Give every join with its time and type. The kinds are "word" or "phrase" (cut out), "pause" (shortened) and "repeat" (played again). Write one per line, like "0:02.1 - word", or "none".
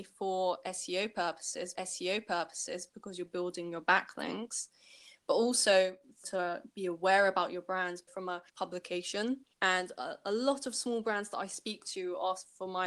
0:01.7 - repeat
0:06.2 - phrase
0:08.1 - word
0:08.5 - word
0:09.5 - pause